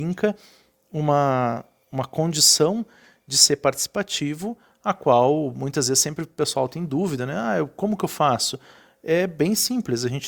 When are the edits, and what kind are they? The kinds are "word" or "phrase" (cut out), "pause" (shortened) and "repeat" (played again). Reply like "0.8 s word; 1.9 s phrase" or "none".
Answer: none